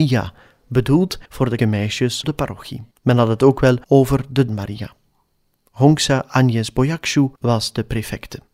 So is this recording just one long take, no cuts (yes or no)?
no